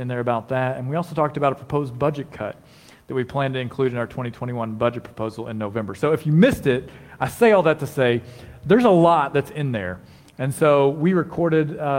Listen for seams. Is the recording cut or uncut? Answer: uncut